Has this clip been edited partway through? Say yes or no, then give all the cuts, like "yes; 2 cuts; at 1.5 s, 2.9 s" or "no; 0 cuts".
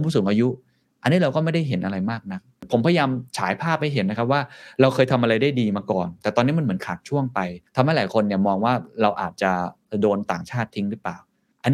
yes; 2 cuts; at 3.3 s, 7.7 s